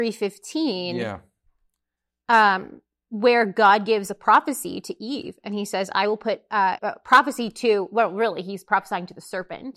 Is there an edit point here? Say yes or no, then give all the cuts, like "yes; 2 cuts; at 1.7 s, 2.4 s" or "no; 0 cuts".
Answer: yes; 1 cut; at 6.8 s